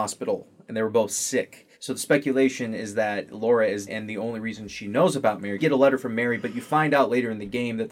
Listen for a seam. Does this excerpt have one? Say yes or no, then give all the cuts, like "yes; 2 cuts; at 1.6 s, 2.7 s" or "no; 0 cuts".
yes; 3 cuts; at 1.7 s, 3.9 s, 5.6 s